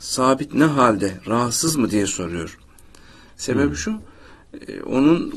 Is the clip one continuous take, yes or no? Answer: yes